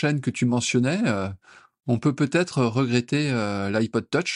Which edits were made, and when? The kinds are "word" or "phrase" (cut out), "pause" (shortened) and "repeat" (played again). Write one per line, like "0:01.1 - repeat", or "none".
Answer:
none